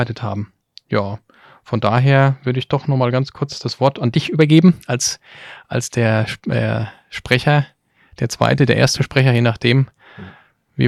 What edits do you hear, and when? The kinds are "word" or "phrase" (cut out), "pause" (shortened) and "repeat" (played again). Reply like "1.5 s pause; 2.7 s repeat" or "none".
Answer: none